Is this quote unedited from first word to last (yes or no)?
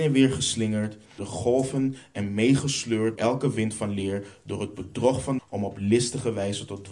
no